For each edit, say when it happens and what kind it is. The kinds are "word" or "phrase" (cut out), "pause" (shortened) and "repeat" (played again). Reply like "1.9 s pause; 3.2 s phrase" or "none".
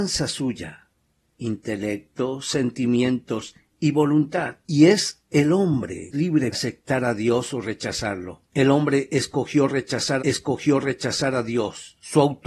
6.1 s word; 6.5 s word; 8.5 s pause; 10.2 s repeat